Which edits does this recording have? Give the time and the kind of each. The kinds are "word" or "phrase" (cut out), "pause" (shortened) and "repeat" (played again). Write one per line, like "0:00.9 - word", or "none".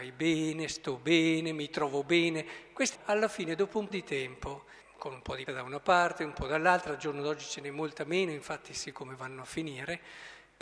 0:02.9 - word
0:03.9 - word
0:04.8 - word
0:05.5 - word
0:08.9 - word